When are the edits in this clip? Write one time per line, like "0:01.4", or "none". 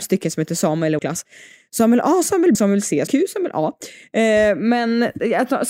0:01.0
0:02.5
0:03.1